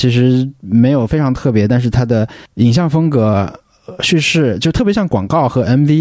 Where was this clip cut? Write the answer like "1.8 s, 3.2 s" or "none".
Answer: 2.5 s